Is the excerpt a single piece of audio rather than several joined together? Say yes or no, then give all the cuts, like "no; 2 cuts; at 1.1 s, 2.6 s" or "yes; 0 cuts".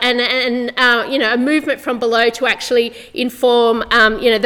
yes; 0 cuts